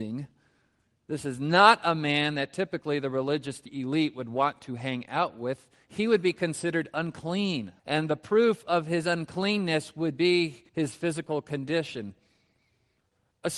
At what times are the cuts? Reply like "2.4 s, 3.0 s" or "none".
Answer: 7.8 s, 10.7 s